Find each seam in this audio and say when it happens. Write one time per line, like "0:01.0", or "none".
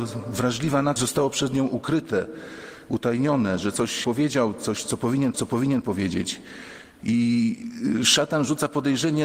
0:01.0
0:04.0
0:05.3